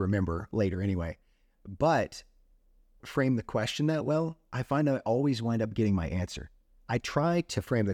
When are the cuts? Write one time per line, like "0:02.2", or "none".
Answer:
0:03.0